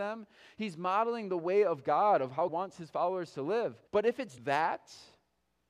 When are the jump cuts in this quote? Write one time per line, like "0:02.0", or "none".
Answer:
0:02.5
0:03.9
0:04.4